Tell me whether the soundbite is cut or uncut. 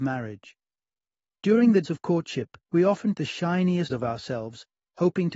cut